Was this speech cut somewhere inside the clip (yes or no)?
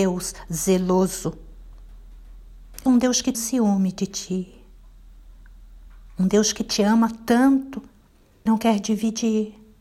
yes